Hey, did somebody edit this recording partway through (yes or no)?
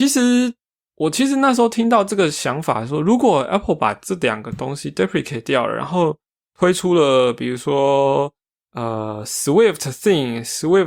no